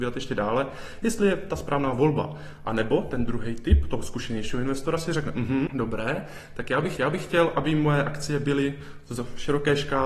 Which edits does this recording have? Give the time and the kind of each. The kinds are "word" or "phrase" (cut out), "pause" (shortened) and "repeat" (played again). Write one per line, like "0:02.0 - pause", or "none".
0:05.7 - word
0:07.0 - repeat